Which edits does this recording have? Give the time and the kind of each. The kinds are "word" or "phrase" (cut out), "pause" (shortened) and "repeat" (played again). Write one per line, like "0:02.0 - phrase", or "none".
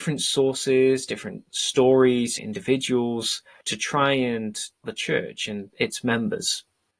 0:02.4 - word
0:04.8 - phrase